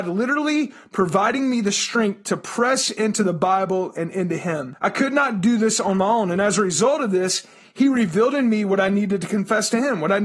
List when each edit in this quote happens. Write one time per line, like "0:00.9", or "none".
none